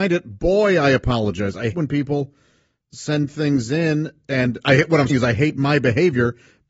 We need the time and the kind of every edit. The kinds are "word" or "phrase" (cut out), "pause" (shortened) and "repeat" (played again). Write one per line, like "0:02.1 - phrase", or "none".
0:01.7 - word
0:05.1 - word